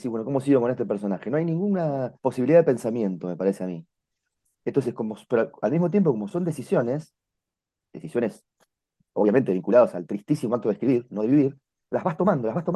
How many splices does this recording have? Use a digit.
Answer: 1